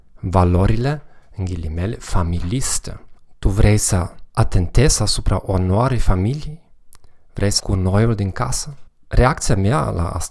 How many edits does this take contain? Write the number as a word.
two